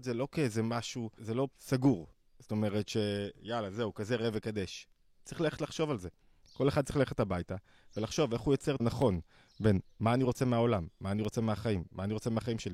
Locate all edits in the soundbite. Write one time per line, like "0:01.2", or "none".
0:01.2
0:01.5
0:08.8